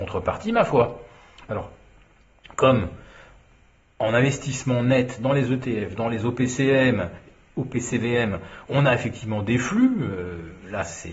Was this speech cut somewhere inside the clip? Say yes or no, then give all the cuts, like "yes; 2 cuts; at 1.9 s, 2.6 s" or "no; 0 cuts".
no; 0 cuts